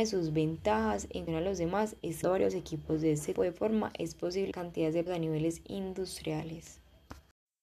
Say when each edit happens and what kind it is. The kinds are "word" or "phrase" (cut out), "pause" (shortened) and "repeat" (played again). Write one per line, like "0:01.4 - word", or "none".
0:01.3 - word
0:02.2 - phrase
0:03.3 - word
0:04.5 - word
0:05.1 - word